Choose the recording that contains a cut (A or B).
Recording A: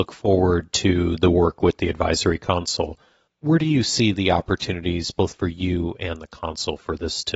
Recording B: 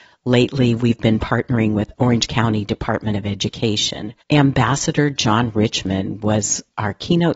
B